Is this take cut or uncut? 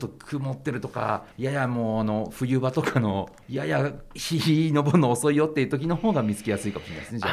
cut